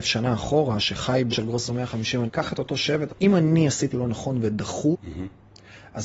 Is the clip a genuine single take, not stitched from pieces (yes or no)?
no